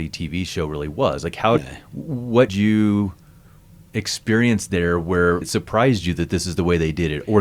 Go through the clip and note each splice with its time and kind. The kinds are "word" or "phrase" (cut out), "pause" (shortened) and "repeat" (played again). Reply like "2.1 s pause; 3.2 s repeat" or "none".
1.6 s word; 2.5 s word; 5.4 s word